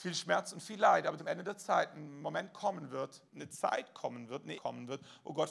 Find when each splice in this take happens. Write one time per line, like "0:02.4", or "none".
0:01.2
0:03.3
0:04.6